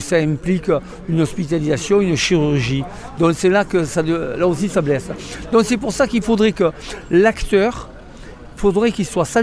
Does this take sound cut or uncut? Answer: uncut